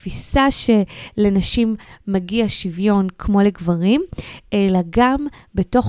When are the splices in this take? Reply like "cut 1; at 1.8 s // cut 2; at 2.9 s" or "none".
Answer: none